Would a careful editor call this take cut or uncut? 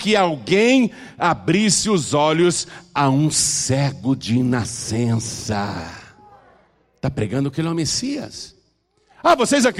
uncut